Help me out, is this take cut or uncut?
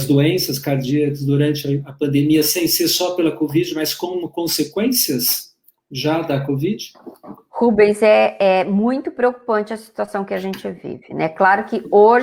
uncut